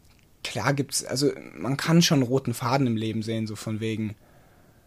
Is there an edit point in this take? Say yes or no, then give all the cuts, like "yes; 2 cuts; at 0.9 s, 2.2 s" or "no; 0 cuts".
no; 0 cuts